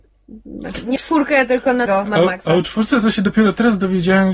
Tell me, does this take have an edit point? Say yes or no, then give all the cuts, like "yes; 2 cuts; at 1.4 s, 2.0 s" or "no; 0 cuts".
yes; 2 cuts; at 1.0 s, 1.9 s